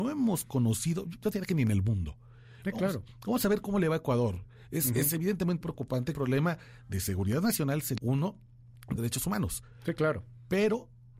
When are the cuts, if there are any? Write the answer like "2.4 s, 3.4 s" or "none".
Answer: 5.6 s, 6.1 s, 8.0 s, 9.0 s